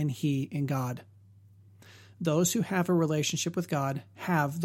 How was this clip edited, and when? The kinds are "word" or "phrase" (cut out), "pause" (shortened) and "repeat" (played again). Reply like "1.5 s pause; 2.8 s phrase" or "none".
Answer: none